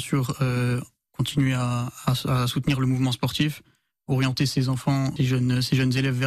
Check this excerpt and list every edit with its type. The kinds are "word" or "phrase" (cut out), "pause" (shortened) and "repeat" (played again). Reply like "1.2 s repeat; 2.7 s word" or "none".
5.2 s word